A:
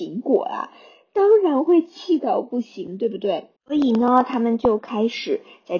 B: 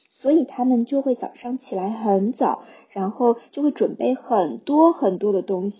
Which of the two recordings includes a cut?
A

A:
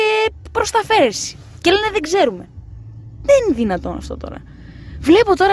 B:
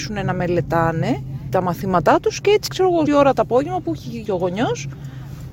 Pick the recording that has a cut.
B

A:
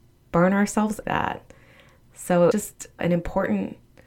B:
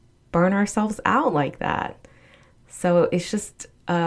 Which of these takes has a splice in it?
A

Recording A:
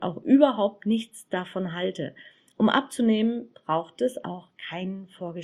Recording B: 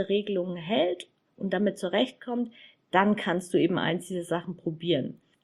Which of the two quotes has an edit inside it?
A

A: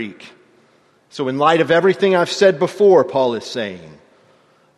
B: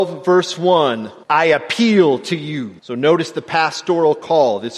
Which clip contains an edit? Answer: B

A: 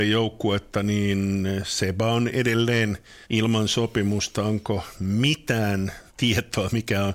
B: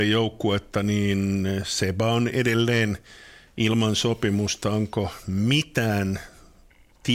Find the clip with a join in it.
A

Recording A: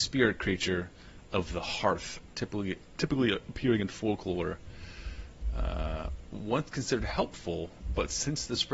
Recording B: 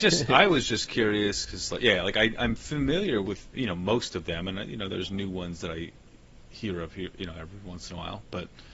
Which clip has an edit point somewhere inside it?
B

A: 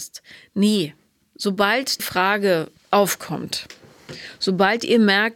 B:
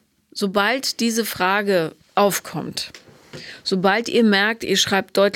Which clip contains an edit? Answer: A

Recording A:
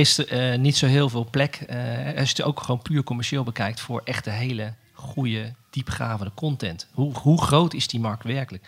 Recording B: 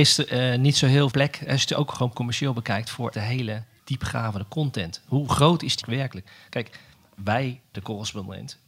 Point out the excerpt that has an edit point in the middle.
B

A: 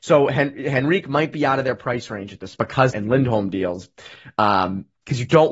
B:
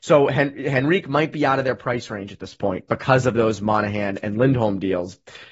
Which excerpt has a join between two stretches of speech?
A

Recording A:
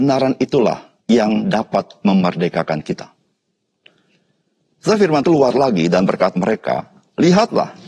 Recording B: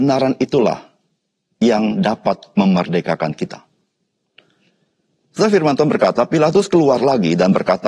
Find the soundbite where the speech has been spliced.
A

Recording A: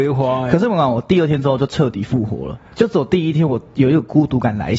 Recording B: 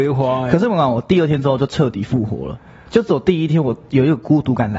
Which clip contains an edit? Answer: A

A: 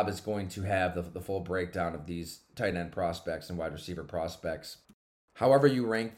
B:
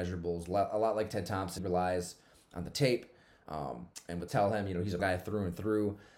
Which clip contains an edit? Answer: B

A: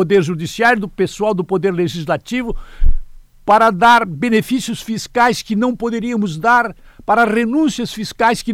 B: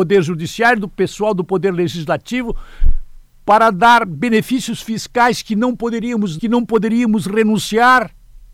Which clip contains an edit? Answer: B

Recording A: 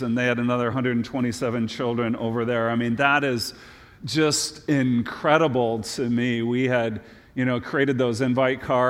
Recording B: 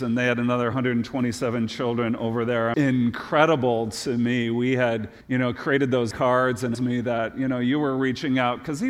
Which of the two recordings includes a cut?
B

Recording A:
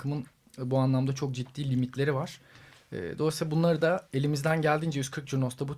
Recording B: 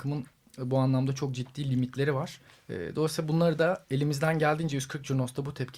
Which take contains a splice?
B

